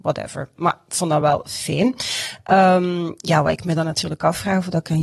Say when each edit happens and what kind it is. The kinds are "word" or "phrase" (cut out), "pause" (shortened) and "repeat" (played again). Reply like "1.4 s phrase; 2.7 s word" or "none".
none